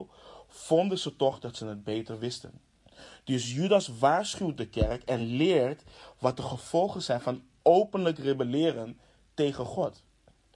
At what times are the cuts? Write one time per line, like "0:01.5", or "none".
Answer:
none